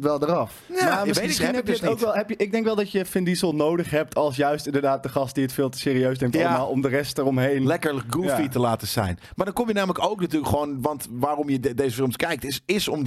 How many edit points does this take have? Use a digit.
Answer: 0